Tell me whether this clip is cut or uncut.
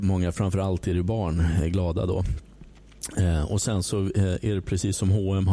uncut